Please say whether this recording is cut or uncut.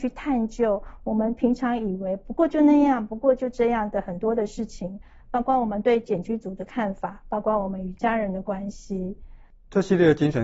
uncut